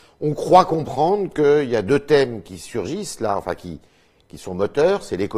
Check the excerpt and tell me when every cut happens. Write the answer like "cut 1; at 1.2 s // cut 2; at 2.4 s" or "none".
none